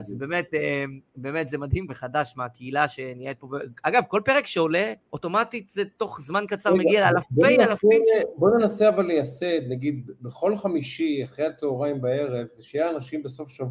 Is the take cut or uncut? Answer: cut